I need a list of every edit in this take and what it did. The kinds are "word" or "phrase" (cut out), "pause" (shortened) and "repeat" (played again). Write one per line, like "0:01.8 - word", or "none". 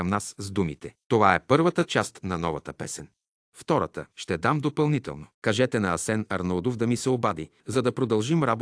0:01.0 - pause
0:04.1 - pause
0:05.3 - pause
0:07.6 - pause